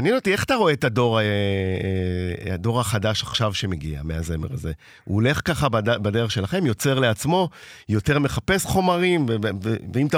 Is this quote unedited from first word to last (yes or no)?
yes